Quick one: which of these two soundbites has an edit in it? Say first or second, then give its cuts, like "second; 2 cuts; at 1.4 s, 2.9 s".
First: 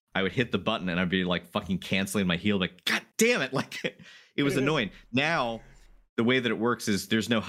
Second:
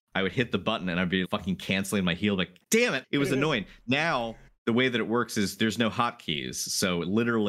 second; 4 cuts; at 1.2 s, 2.6 s, 3.0 s, 4.5 s